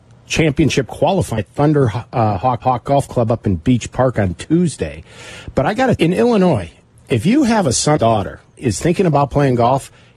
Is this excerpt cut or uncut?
cut